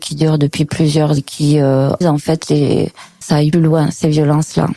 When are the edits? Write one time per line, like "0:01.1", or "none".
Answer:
0:01.2
0:02.0
0:03.2
0:03.5